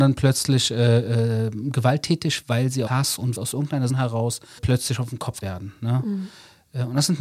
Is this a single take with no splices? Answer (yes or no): no